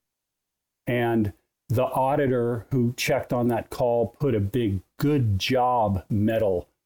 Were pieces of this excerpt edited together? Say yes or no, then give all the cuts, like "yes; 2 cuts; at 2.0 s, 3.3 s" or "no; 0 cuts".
no; 0 cuts